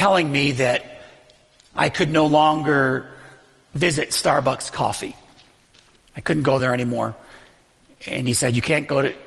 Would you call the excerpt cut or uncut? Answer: uncut